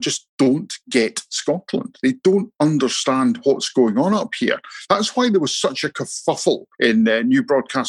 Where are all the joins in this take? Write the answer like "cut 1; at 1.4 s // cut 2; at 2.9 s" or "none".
cut 1; at 6.7 s